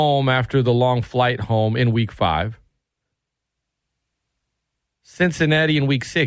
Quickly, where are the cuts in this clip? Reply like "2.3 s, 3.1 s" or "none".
none